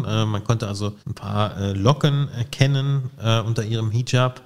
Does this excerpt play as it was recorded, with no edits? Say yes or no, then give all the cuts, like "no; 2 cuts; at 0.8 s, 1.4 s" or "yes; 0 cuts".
no; 1 cut; at 1.0 s